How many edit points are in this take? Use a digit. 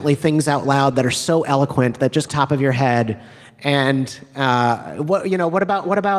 1